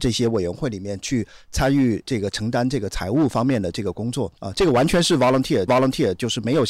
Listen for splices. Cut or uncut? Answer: cut